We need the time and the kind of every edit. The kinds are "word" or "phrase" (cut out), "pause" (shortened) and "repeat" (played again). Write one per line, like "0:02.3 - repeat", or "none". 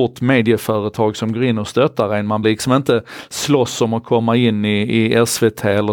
0:02.4 - word